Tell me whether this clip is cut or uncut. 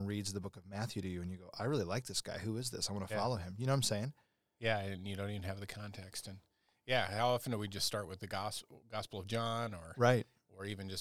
uncut